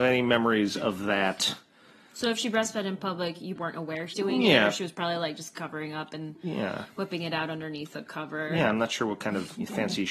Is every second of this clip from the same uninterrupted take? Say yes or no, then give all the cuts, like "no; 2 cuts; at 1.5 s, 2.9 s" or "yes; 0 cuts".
no; 2 cuts; at 3.6 s, 4.1 s